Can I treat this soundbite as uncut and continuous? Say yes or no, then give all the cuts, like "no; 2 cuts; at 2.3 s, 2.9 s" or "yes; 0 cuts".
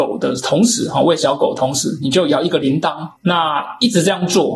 no; 1 cut; at 3.2 s